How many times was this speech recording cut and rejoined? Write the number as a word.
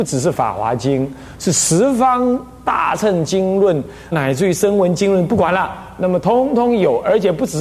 one